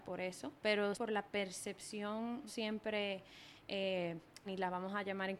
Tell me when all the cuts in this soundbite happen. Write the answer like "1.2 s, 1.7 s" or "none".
0.9 s, 2.5 s, 4.5 s